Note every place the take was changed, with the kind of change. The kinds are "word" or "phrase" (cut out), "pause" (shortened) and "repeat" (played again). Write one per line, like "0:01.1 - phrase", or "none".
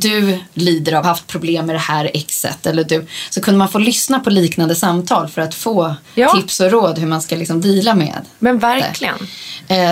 0:01.0 - phrase
0:06.0 - pause